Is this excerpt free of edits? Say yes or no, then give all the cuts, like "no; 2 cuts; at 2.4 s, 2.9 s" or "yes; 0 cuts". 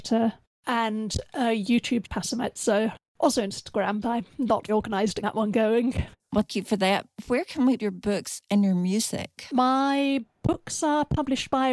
no; 6 cuts; at 2.0 s, 4.0 s, 4.7 s, 5.2 s, 6.5 s, 7.8 s